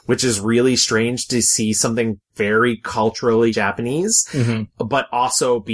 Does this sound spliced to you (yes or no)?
no